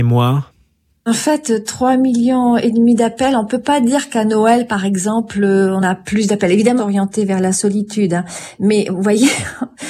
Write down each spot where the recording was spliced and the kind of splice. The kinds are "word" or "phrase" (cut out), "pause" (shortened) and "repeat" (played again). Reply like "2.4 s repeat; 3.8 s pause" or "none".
6.8 s phrase